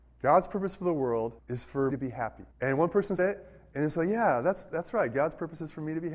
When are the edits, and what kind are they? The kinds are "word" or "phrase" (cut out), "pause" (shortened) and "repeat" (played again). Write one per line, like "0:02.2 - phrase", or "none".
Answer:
0:01.4 - pause
0:01.9 - word
0:02.5 - pause
0:03.2 - word